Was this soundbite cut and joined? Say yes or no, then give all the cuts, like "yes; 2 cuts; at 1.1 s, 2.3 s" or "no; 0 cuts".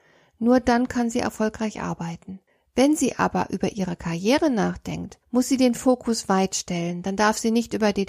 yes; 2 cuts; at 2.5 s, 5.2 s